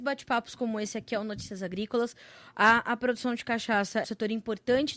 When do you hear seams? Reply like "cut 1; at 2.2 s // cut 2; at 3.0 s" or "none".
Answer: cut 1; at 4.0 s